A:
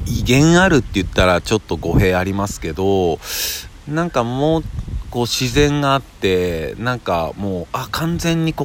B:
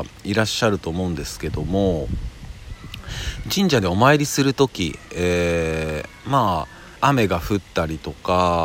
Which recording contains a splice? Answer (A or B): B